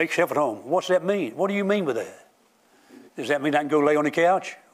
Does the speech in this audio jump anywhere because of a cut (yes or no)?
yes